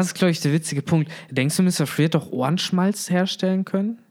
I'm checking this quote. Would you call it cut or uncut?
uncut